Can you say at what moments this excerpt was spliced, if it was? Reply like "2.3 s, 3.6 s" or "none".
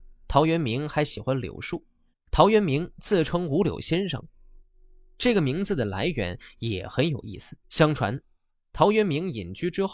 2.1 s, 7.6 s